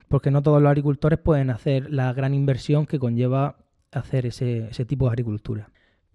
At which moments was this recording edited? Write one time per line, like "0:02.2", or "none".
none